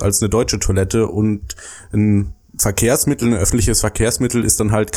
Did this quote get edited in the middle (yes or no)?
no